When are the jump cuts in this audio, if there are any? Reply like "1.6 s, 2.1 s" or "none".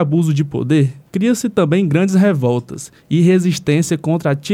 1.1 s